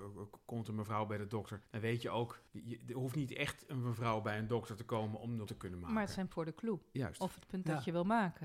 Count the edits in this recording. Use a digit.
4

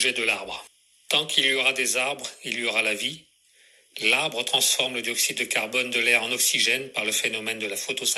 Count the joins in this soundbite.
0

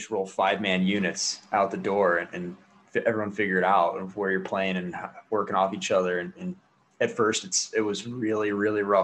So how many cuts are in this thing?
0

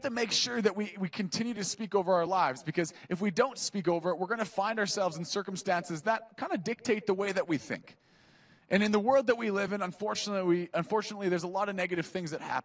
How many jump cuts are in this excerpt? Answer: 0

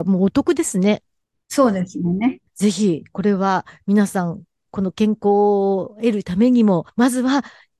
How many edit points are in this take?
2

